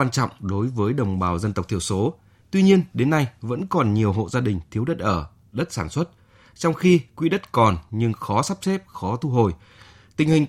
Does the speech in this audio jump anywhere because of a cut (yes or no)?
no